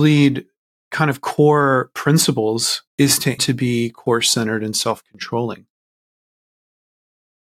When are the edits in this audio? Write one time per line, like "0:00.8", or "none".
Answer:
0:02.9
0:03.4